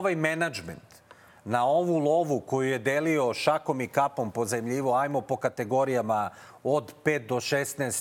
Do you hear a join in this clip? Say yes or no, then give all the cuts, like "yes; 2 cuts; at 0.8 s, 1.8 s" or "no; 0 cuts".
no; 0 cuts